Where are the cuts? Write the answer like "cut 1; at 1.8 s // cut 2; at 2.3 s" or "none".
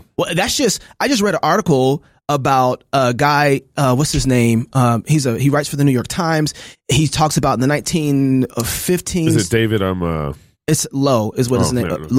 none